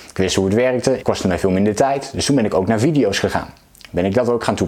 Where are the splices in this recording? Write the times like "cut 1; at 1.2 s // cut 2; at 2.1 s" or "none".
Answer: cut 1; at 1.0 s